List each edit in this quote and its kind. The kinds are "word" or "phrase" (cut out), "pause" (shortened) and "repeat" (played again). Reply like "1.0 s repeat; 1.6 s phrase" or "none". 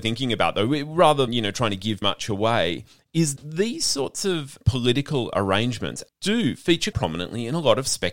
1.3 s word; 2.0 s word; 3.4 s word; 4.6 s word; 6.1 s word; 6.9 s word